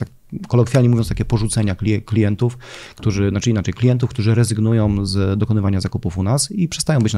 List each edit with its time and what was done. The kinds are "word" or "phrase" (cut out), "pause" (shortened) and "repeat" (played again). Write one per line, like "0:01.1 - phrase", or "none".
none